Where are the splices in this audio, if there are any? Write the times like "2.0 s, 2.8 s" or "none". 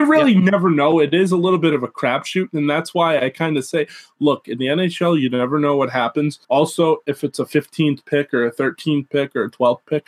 6.4 s